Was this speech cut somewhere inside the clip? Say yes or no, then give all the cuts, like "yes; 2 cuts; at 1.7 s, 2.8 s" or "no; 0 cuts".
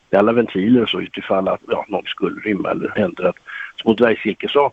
yes; 4 cuts; at 1.1 s, 1.6 s, 2.0 s, 3.0 s